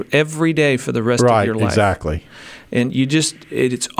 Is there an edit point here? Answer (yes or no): no